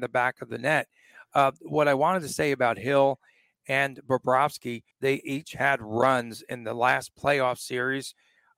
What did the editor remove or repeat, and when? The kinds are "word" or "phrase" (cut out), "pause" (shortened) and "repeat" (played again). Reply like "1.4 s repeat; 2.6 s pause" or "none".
4.9 s pause